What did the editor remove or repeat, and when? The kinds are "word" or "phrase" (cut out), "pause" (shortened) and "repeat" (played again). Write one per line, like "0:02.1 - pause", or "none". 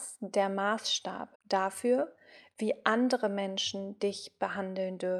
0:01.3 - pause